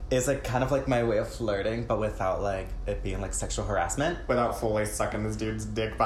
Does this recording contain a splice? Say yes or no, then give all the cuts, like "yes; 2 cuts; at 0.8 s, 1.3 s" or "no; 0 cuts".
no; 0 cuts